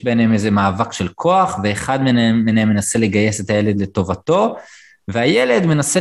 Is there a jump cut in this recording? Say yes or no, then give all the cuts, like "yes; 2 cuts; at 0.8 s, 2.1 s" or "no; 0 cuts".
no; 0 cuts